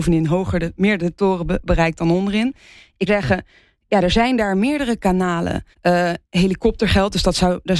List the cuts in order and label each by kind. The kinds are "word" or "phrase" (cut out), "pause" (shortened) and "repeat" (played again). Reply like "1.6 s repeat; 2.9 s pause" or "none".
3.1 s word; 5.7 s pause